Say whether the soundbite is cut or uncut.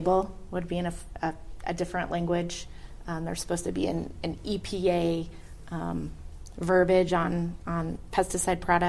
uncut